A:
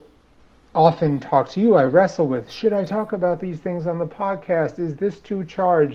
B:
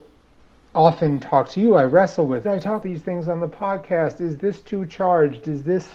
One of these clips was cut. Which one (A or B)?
B